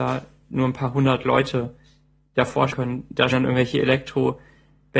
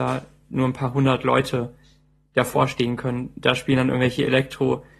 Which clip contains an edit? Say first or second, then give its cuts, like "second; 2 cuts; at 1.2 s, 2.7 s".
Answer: first; 2 cuts; at 2.7 s, 3.3 s